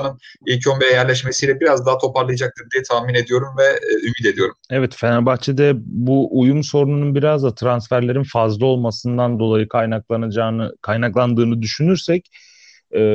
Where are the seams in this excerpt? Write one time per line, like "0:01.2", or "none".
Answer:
0:04.6